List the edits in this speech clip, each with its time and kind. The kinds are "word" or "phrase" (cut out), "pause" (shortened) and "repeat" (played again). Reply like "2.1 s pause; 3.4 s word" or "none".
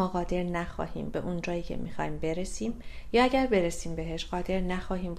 1.1 s word